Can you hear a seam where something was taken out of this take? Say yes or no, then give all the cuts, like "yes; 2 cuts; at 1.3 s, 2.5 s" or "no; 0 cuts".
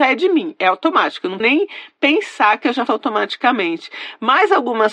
yes; 2 cuts; at 1.4 s, 2.9 s